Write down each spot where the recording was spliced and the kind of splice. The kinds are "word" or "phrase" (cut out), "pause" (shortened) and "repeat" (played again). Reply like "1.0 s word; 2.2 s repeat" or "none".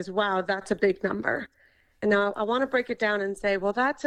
none